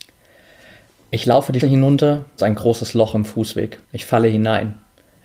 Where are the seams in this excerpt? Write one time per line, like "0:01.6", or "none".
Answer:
0:01.6
0:02.4
0:03.8